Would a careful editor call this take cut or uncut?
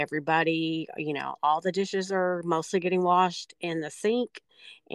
uncut